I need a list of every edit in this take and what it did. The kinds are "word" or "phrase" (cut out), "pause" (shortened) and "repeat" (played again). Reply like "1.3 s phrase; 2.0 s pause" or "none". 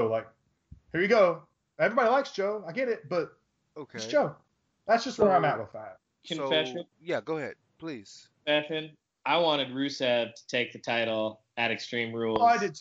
6.9 s pause